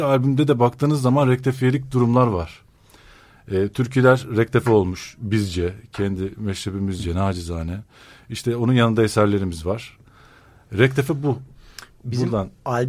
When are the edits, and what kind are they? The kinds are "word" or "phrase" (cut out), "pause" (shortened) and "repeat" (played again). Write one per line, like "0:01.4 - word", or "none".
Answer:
none